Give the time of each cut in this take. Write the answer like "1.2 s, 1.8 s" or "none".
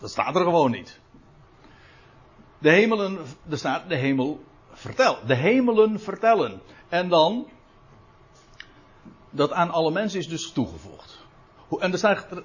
none

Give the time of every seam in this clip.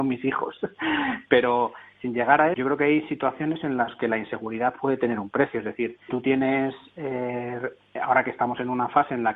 2.5 s, 6.1 s, 8.0 s

